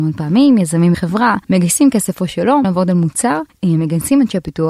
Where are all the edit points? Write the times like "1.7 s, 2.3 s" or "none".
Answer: 0.9 s, 1.4 s, 2.6 s, 3.5 s